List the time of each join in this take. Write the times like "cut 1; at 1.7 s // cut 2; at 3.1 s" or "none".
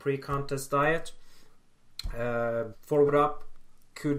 cut 1; at 2.7 s // cut 2; at 3.1 s